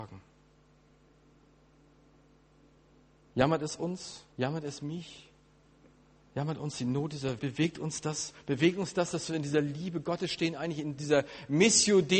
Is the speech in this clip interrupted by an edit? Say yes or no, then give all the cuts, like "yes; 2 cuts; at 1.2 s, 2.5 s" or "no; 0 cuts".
yes; 2 cuts; at 4.3 s, 7.4 s